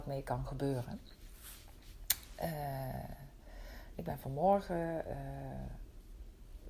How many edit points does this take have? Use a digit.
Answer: 0